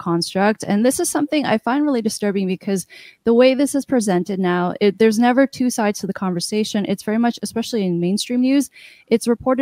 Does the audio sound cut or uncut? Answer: cut